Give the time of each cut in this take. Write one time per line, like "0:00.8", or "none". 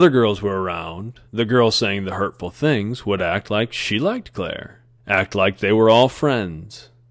0:01.3
0:05.0